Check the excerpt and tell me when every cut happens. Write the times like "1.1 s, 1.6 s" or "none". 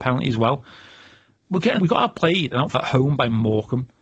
1.8 s, 2.7 s

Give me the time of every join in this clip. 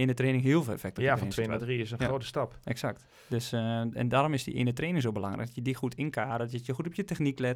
none

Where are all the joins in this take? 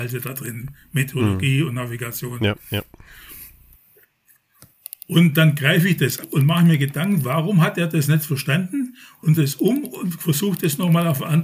6.2 s, 9.4 s

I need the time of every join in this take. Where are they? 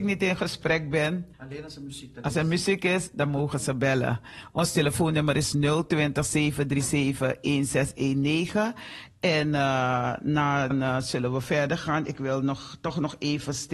1.3 s, 10.7 s

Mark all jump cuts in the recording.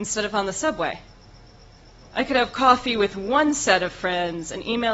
none

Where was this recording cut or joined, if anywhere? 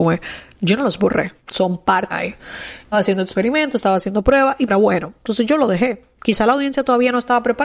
1.4 s, 2.1 s, 2.9 s, 4.7 s

